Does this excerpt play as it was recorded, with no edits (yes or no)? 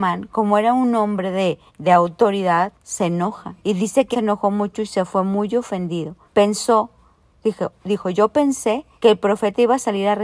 no